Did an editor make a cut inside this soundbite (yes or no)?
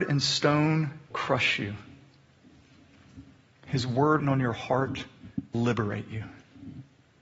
yes